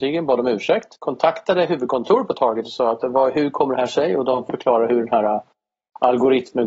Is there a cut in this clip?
yes; 1 cut; at 1.0 s

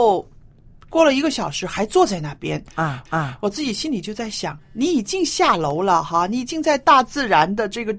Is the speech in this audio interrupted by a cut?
yes; 2 cuts; at 3.1 s, 4.6 s

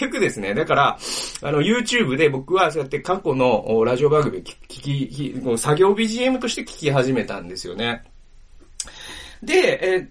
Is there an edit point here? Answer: no; 0 cuts

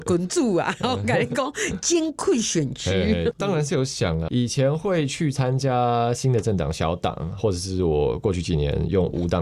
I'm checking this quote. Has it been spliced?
yes; 1 cut; at 7.4 s

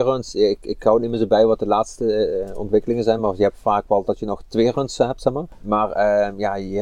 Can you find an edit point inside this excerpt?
no; 0 cuts

